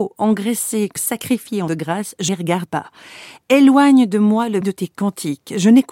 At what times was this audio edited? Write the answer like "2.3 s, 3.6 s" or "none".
1.0 s, 1.7 s, 2.3 s, 2.6 s, 4.6 s